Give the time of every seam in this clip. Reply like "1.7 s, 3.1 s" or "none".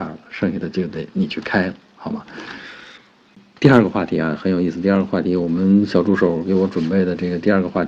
none